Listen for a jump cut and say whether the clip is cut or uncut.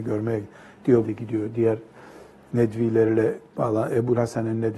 cut